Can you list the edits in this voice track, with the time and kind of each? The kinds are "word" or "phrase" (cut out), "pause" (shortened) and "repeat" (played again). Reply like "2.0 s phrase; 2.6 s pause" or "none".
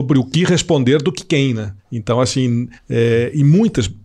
1.8 s pause; 2.8 s pause